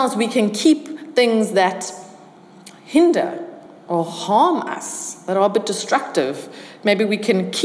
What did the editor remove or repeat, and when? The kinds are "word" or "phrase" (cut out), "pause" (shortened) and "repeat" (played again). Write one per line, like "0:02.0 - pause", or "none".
none